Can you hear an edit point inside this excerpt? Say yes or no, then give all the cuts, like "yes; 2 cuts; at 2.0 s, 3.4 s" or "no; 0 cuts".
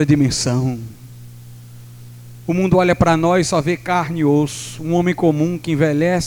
no; 0 cuts